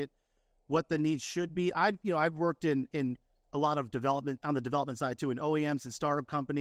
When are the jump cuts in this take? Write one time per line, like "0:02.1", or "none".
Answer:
none